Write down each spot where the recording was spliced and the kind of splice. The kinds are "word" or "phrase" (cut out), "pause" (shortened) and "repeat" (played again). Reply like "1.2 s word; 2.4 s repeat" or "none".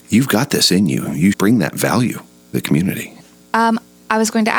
1.3 s word; 2.5 s word